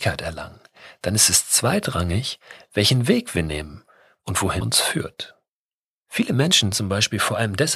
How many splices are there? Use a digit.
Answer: 2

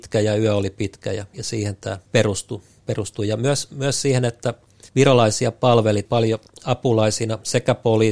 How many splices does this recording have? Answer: 2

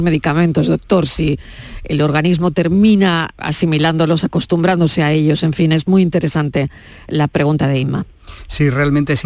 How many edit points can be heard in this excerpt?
1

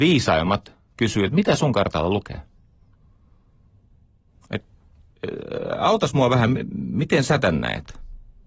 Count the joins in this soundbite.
0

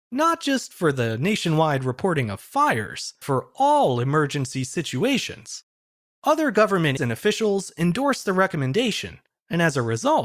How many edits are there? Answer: 2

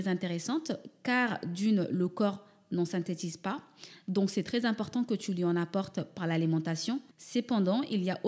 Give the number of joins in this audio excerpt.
1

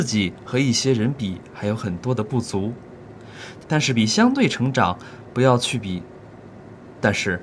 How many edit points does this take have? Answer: 1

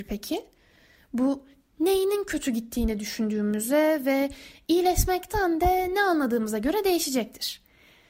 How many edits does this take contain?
0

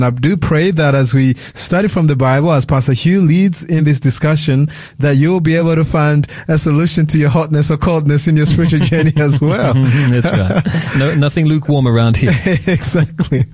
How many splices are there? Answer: 0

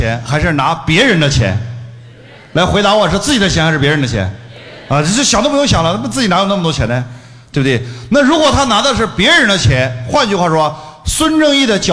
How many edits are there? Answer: 0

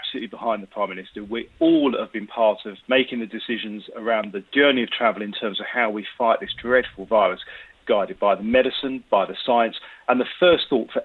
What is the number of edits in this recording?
3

